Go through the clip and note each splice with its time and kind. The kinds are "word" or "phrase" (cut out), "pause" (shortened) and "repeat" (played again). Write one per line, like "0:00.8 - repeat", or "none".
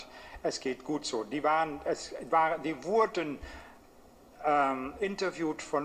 0:02.3 - word